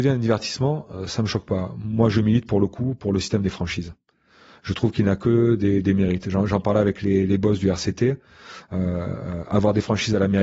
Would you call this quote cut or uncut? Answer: uncut